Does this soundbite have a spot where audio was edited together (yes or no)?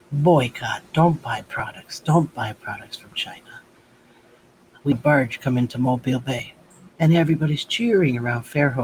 yes